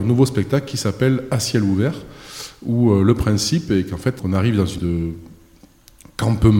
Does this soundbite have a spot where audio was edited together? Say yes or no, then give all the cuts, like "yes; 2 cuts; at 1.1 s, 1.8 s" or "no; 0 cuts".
yes; 2 cuts; at 4.2 s, 4.8 s